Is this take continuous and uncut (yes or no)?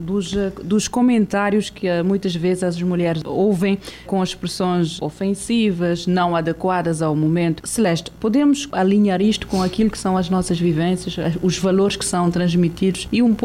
no